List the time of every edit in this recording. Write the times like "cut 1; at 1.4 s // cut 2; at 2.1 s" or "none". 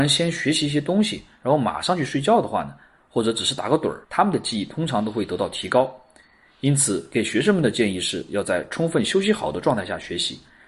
cut 1; at 4.0 s